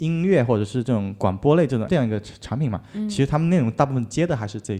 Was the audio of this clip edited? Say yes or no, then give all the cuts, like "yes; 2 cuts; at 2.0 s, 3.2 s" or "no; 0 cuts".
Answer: yes; 1 cut; at 1.9 s